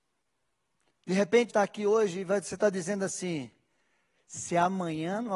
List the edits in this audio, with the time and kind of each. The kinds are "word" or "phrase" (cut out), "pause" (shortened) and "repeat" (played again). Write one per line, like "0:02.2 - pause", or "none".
0:01.5 - word